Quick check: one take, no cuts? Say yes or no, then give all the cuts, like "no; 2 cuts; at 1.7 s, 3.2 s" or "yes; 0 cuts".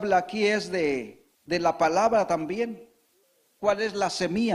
no; 2 cuts; at 1.3 s, 3.2 s